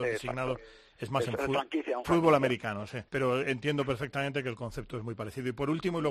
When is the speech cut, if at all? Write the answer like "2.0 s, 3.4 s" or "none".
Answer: 2.0 s, 3.1 s